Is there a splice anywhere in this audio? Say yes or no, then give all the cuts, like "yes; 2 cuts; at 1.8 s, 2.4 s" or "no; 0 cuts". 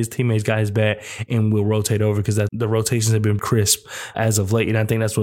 yes; 3 cuts; at 2.5 s, 3.4 s, 4.1 s